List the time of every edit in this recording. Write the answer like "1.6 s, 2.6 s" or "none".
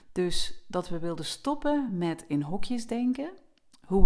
none